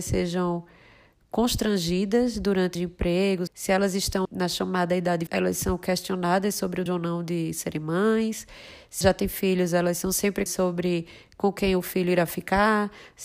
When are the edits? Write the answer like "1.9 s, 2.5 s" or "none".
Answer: 2.7 s, 3.5 s, 4.2 s, 5.3 s, 6.9 s, 9.0 s, 10.5 s